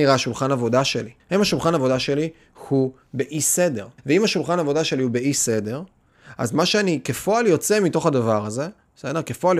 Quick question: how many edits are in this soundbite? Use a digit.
2